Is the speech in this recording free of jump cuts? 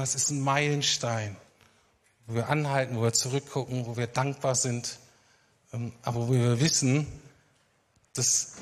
yes; 0 cuts

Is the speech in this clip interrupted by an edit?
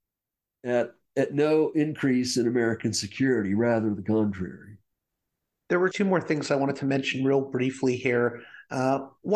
yes; 2 cuts; at 1.1 s, 5.9 s

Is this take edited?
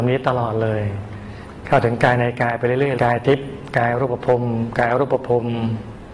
yes; 1 cut; at 3.0 s

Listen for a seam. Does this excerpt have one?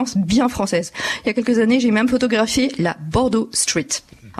no; 0 cuts

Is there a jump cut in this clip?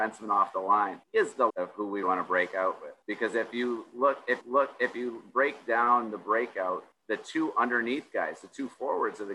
yes; 6 cuts; at 1.0 s, 1.5 s, 2.0 s, 3.0 s, 4.4 s, 6.9 s

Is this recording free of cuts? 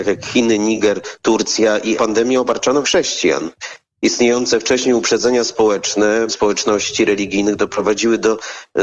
no; 3 cuts; at 1.9 s, 2.8 s, 6.3 s

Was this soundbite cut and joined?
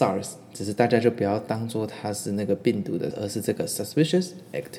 yes; 1 cut; at 3.1 s

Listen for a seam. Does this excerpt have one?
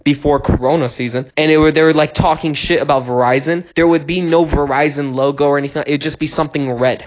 yes; 2 cuts; at 1.3 s, 3.7 s

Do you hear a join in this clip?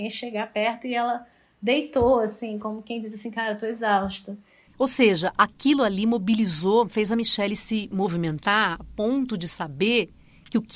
no; 0 cuts

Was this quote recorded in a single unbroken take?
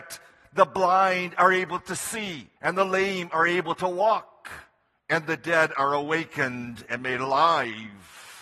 no; 2 cuts; at 2.6 s, 4.9 s

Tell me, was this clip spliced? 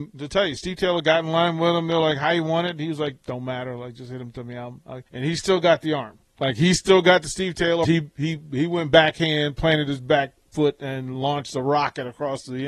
yes; 4 cuts; at 3.2 s, 5.1 s, 6.3 s, 7.8 s

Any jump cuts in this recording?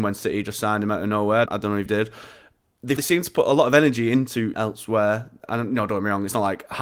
yes; 4 cuts; at 1.5 s, 1.9 s, 3.0 s, 4.5 s

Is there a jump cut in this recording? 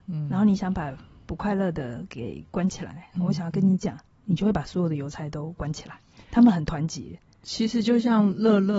no; 0 cuts

